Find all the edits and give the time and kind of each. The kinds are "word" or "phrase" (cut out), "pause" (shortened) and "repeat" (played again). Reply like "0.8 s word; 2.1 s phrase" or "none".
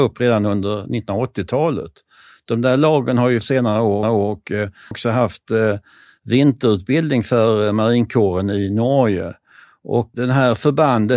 3.4 s phrase; 4.0 s repeat; 4.9 s phrase; 10.1 s word